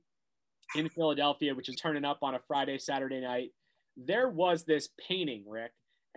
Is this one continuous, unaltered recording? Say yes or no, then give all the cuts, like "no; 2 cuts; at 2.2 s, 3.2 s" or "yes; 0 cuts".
no; 1 cut; at 1.7 s